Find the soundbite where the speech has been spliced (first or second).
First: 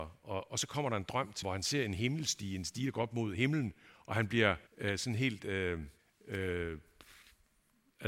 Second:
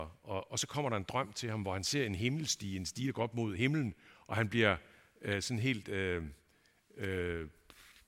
first